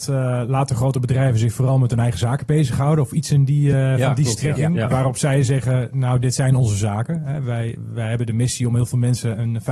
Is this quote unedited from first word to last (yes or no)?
yes